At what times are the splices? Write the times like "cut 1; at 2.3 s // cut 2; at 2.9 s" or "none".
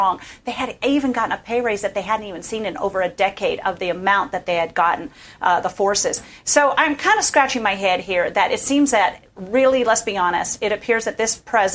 none